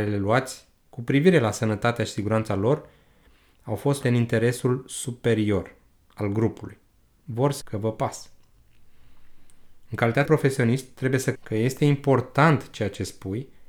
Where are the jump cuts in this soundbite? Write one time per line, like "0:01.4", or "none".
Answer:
0:04.0
0:07.6
0:10.2
0:11.3